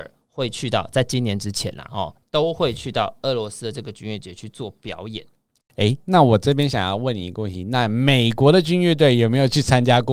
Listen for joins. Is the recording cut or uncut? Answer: uncut